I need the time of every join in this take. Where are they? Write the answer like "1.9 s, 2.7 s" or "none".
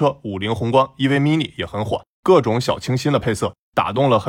none